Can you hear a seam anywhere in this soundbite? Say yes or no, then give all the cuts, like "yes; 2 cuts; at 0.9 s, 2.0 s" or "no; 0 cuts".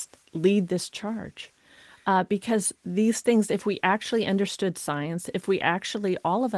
no; 0 cuts